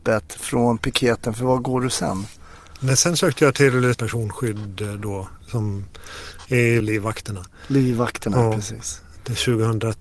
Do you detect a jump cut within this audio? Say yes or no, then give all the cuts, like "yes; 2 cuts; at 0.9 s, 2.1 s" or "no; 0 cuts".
yes; 2 cuts; at 3.9 s, 6.8 s